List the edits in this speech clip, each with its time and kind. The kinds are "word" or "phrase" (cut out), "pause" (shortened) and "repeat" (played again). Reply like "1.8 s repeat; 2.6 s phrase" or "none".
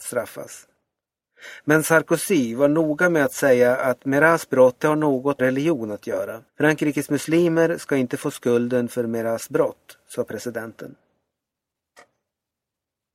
4.8 s word; 5.4 s word; 6.5 s pause